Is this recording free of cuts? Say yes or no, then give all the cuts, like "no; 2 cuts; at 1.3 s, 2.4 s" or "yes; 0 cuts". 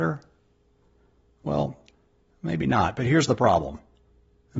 yes; 0 cuts